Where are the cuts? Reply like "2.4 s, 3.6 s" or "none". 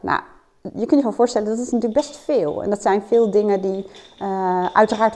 none

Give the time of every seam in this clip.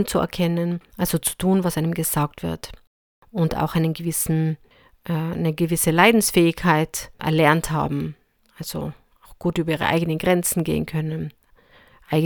none

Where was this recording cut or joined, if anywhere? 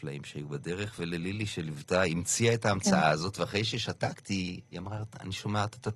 4.6 s

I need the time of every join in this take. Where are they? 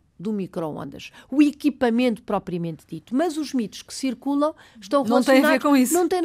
none

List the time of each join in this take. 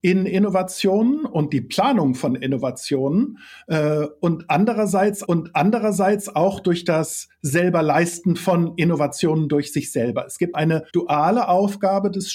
5.2 s, 10.5 s, 10.9 s

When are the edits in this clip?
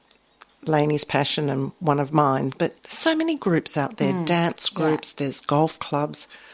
2.8 s

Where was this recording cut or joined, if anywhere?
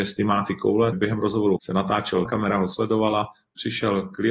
0.9 s, 1.6 s, 2.2 s

